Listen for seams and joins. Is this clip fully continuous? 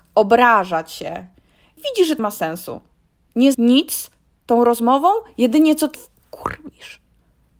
no; 4 cuts; at 1.8 s, 2.2 s, 3.5 s, 5.9 s

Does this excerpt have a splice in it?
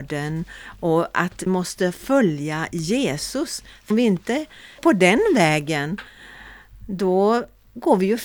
yes; 3 cuts; at 1.5 s, 3.9 s, 4.8 s

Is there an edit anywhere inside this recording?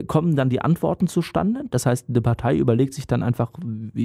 no; 0 cuts

